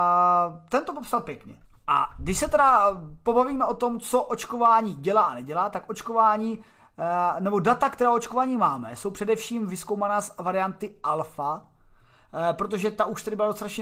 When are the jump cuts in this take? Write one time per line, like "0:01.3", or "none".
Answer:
0:01.6